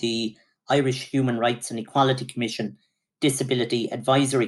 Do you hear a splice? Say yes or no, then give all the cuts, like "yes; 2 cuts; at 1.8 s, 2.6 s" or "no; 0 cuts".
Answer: no; 0 cuts